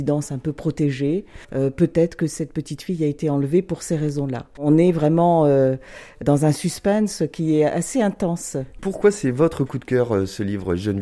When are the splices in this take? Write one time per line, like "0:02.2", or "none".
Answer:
0:01.4